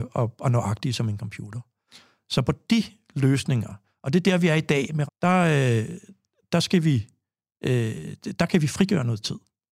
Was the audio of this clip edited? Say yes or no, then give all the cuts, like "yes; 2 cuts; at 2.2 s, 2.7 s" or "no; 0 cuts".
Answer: yes; 1 cut; at 5.1 s